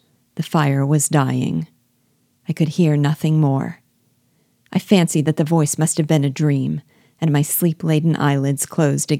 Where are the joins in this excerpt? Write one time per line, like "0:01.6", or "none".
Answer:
none